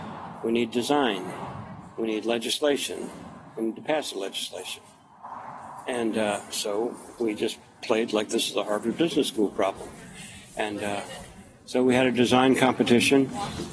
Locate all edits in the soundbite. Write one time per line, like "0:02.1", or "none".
none